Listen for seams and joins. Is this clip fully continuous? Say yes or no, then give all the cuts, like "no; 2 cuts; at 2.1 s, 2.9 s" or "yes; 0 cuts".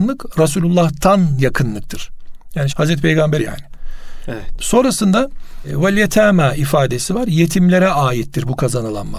no; 2 cuts; at 2.7 s, 3.4 s